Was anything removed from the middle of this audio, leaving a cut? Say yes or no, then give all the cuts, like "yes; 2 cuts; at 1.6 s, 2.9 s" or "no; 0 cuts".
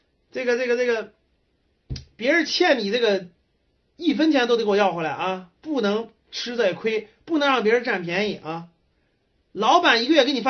no; 0 cuts